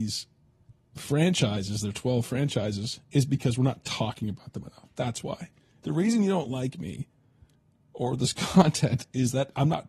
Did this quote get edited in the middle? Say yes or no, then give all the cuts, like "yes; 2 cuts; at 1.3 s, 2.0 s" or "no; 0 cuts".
no; 0 cuts